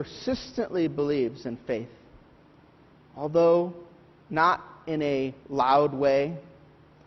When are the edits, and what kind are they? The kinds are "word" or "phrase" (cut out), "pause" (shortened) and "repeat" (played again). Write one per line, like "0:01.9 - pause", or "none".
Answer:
0:05.4 - pause